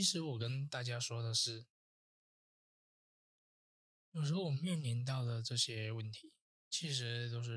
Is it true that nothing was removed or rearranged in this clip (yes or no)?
yes